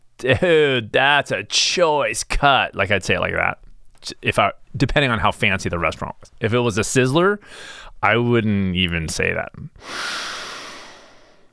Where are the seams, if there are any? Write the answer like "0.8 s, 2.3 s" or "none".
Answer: none